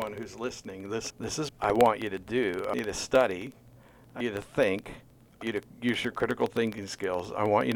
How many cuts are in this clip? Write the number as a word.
five